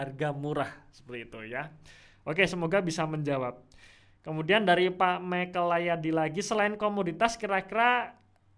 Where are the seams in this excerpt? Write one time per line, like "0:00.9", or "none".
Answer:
none